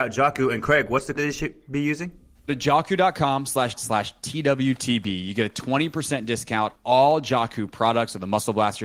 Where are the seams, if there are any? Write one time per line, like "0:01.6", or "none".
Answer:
0:01.2
0:02.5
0:03.7
0:06.7